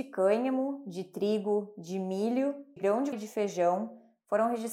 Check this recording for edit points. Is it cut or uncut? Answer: cut